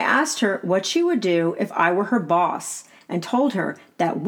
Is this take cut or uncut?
uncut